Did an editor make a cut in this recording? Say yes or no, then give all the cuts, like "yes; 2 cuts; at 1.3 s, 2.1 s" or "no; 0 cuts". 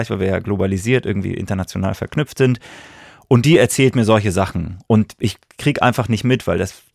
no; 0 cuts